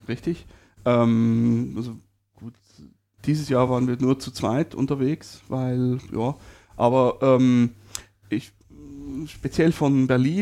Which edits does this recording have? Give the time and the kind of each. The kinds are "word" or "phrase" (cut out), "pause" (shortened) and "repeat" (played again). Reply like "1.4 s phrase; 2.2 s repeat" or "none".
none

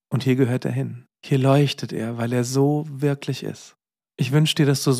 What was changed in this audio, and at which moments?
1.2 s pause; 3.9 s pause

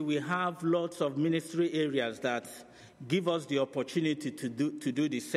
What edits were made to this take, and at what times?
none

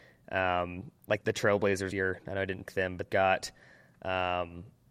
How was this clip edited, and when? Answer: 1.2 s word; 1.9 s word; 2.7 s word; 3.1 s word

